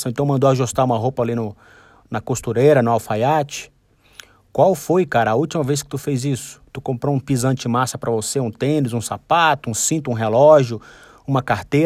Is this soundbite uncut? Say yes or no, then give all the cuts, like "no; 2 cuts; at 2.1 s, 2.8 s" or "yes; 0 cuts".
yes; 0 cuts